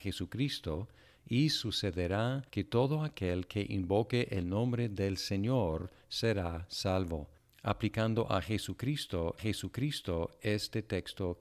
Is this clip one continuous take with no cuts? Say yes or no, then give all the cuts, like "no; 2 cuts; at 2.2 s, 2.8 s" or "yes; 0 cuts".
no; 2 cuts; at 2.5 s, 9.4 s